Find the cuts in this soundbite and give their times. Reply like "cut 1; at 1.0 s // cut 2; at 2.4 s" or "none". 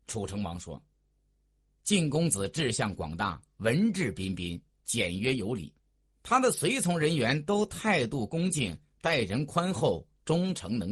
none

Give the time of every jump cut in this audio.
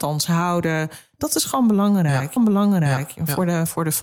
cut 1; at 2.4 s

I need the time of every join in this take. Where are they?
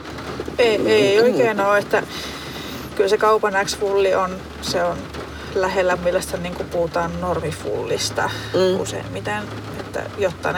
cut 1; at 6.0 s

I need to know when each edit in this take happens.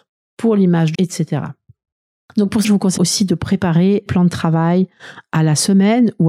cut 1; at 0.9 s // cut 2; at 2.6 s // cut 3; at 3.0 s // cut 4; at 4.1 s

